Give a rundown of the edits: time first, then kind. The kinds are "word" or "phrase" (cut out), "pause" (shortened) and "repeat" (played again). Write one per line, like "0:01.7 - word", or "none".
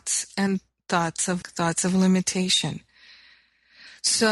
0:01.4 - word